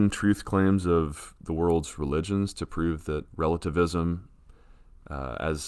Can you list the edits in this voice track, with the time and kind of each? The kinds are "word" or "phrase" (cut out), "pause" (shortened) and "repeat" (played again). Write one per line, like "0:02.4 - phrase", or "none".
0:03.3 - word